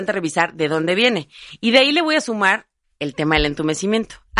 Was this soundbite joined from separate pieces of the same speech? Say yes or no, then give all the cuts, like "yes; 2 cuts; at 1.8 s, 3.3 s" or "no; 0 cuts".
no; 0 cuts